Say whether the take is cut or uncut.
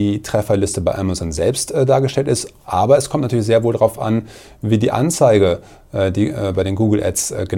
uncut